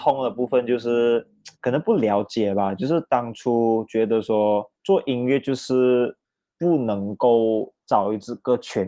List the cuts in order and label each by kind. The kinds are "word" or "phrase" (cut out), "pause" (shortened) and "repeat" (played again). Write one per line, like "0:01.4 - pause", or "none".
0:01.6 - pause
0:04.8 - pause
0:06.2 - pause